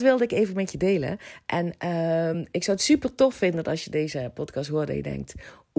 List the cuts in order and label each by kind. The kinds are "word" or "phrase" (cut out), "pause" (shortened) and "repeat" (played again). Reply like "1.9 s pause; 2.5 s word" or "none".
none